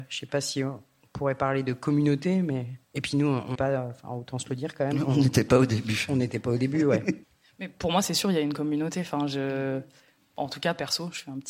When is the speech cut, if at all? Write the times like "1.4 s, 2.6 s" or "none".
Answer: 2.8 s, 3.5 s, 7.2 s